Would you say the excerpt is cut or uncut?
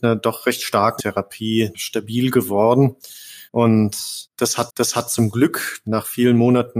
cut